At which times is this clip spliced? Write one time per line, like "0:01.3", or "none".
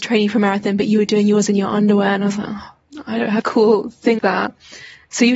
0:03.4
0:04.2